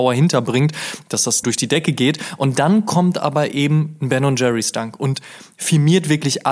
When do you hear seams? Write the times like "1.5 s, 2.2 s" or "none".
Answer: 1.4 s